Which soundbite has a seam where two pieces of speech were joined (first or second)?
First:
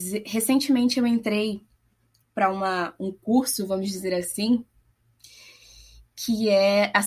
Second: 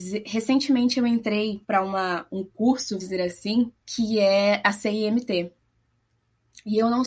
second